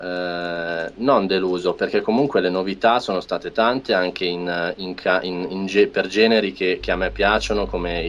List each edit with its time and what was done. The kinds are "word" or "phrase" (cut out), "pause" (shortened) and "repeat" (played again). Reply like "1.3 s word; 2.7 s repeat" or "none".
none